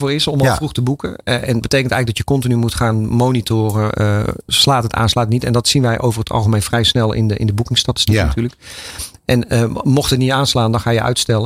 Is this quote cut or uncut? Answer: cut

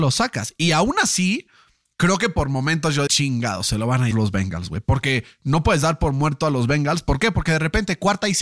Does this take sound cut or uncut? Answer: cut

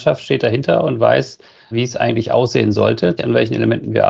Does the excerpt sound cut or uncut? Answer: cut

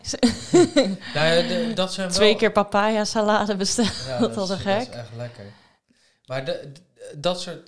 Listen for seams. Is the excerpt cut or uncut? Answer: uncut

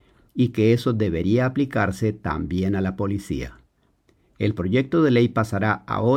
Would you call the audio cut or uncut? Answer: uncut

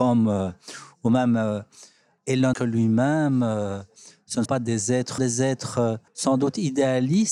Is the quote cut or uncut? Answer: cut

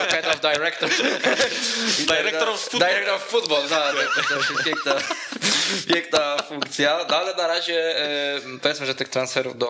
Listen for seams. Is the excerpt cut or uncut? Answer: uncut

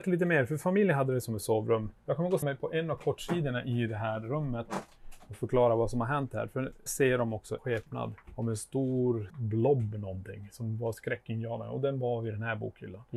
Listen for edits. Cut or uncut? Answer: cut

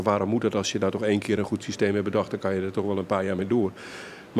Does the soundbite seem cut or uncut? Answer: uncut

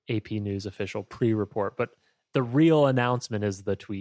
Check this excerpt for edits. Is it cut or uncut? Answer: uncut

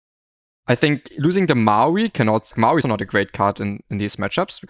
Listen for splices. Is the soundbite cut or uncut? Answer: cut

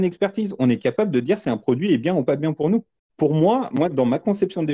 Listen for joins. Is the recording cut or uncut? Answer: uncut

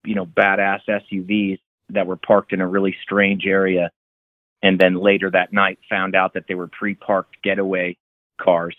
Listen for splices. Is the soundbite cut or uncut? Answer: uncut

